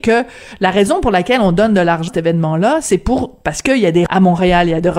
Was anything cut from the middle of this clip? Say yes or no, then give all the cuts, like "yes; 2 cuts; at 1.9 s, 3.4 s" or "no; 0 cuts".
yes; 2 cuts; at 2.1 s, 4.1 s